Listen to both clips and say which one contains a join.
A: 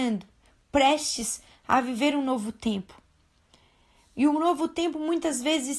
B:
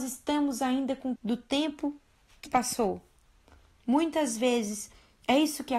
B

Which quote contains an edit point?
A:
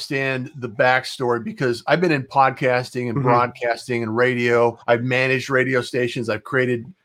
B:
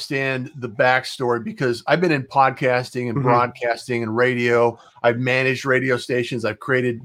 A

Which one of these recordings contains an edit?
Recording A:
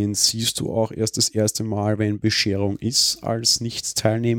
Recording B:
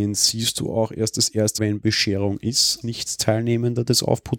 B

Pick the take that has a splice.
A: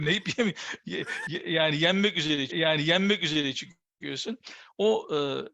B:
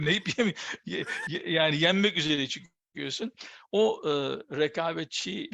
A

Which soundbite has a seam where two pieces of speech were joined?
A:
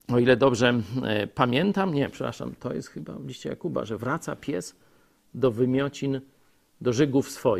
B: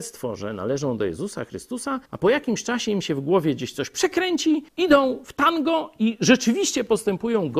B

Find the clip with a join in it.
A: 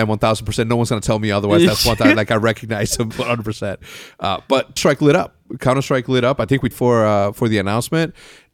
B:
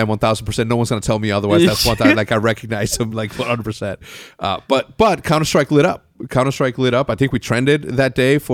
A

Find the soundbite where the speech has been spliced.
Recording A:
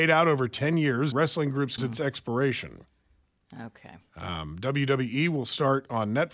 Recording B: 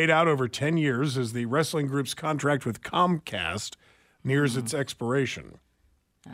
A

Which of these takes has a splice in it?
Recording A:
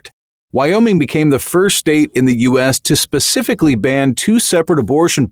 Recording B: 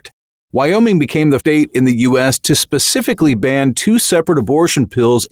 B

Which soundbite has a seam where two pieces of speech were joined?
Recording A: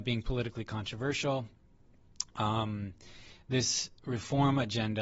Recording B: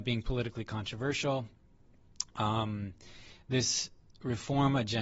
A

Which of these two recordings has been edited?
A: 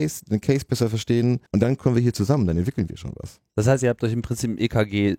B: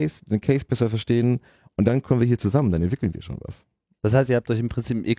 A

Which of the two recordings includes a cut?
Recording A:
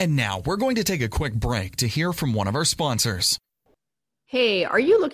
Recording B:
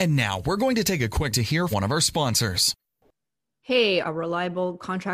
B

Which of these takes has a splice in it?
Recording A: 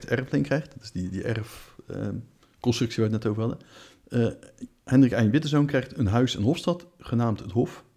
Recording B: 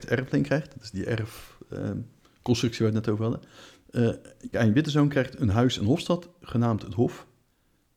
B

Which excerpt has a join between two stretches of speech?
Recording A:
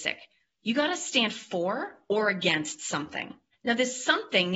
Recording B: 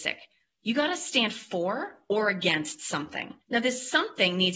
B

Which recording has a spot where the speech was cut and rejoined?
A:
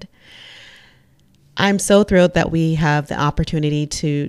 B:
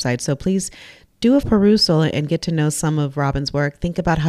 B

